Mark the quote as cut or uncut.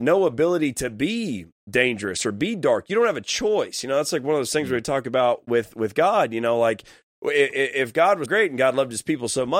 cut